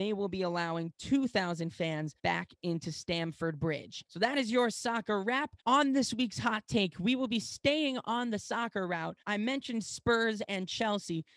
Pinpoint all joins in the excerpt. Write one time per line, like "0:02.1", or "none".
0:02.2
0:04.1
0:05.6
0:09.2